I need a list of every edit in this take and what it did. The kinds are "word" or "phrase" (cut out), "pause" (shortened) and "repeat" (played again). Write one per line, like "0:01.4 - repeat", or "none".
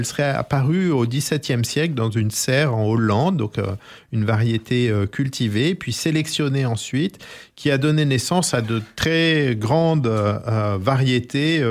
none